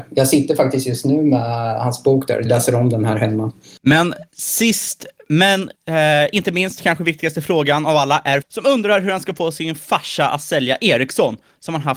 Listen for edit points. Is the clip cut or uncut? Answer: cut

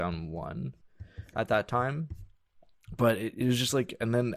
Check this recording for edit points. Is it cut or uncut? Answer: uncut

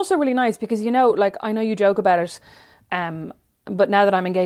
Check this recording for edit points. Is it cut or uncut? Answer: uncut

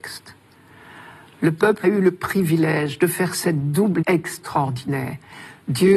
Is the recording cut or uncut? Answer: cut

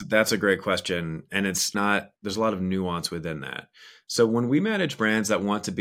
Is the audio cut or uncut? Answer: cut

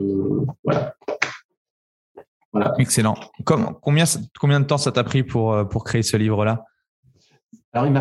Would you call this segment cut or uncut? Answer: uncut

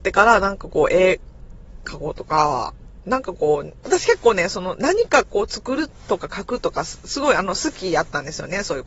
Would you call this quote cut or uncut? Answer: cut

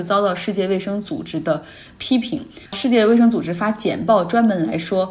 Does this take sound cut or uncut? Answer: cut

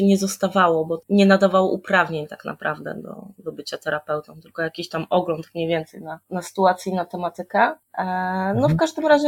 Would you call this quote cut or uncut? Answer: uncut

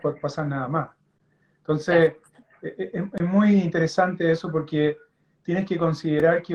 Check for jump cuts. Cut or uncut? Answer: uncut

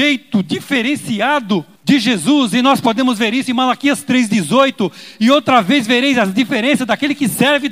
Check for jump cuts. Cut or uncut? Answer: cut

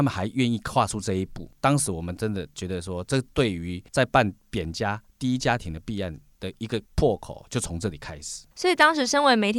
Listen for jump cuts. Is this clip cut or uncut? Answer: cut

